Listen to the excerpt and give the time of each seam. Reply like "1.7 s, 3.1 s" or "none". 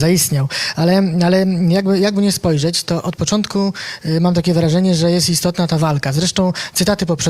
none